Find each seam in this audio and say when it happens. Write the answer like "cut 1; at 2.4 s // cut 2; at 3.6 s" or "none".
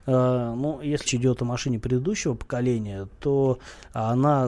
cut 1; at 1.1 s